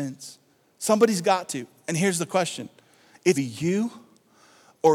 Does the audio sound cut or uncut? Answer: cut